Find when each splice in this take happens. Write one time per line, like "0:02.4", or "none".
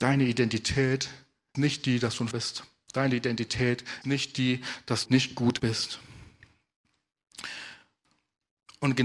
0:01.5
0:02.3
0:04.0
0:05.1
0:05.6